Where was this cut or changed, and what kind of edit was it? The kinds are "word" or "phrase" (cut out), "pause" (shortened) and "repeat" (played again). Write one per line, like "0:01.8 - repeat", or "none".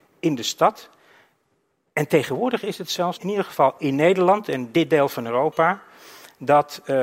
0:03.1 - word